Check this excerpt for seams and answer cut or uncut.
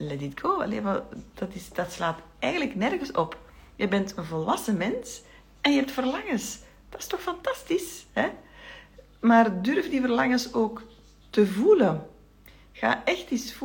uncut